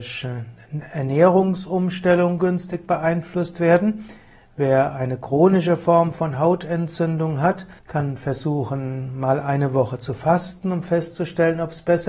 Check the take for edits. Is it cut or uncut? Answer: cut